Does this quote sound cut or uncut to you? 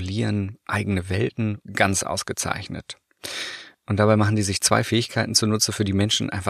cut